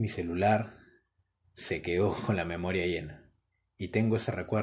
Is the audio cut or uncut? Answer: uncut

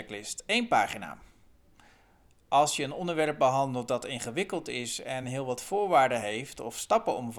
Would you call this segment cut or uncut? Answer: uncut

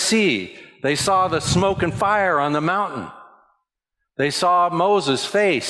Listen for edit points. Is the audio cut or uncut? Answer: uncut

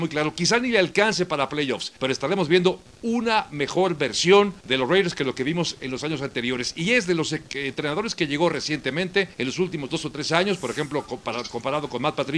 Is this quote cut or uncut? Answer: cut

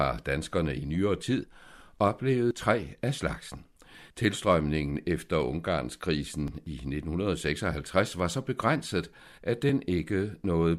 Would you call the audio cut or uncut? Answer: uncut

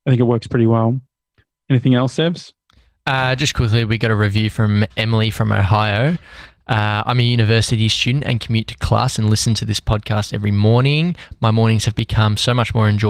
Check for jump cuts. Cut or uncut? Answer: uncut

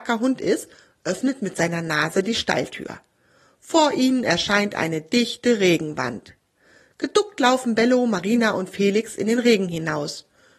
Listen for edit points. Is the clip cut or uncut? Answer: uncut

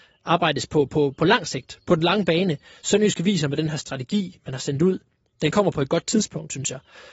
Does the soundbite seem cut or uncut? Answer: uncut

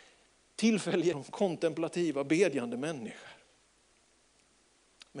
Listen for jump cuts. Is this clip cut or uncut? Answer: cut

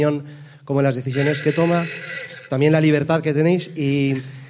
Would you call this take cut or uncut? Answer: uncut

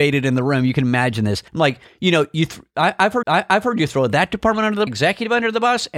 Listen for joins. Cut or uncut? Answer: cut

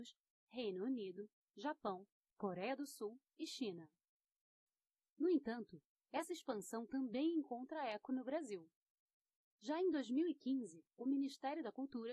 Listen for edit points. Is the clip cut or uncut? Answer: uncut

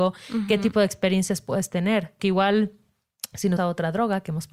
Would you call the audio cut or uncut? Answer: cut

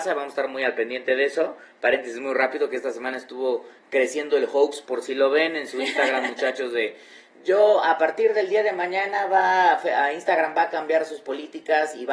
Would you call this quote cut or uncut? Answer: uncut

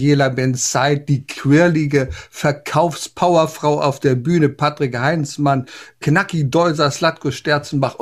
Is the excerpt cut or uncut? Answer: uncut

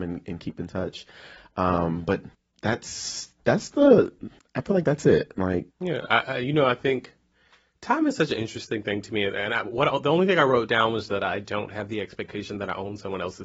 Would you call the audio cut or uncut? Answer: cut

